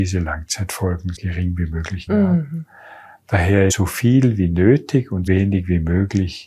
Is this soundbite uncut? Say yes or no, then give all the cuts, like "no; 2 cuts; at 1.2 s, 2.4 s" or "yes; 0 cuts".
no; 4 cuts; at 1.2 s, 2.1 s, 3.7 s, 5.3 s